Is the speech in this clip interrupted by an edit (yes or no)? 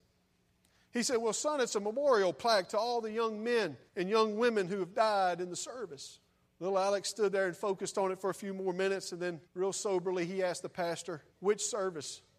yes